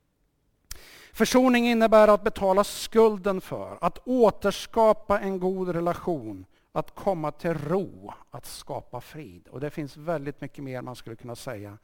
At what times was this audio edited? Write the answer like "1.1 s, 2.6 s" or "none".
6.6 s